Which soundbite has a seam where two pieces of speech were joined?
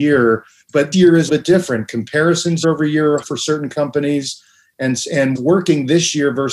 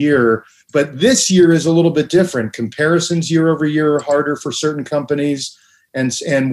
first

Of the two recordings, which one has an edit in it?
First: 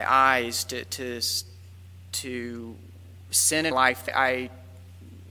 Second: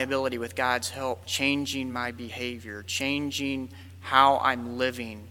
first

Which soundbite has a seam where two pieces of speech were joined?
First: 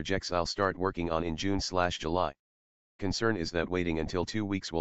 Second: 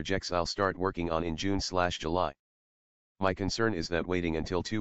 first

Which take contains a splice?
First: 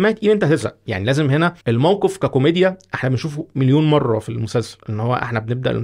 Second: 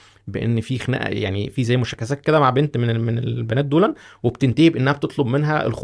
first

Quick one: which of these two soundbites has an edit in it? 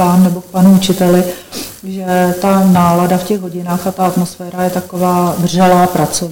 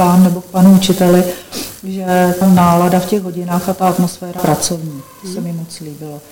second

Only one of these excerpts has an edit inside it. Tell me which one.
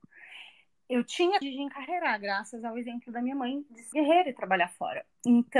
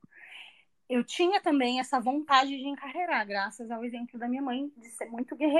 first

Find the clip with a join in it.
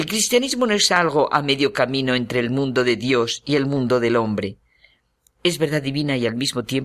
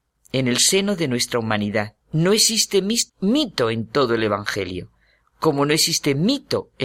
second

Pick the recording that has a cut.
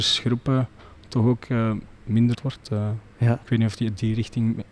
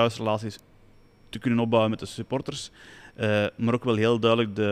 first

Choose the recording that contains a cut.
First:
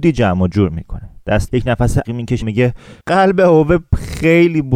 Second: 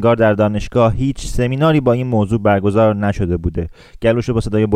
first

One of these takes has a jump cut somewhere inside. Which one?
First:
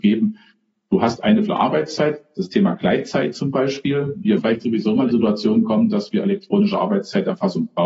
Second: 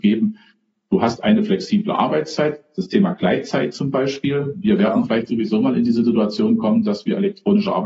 first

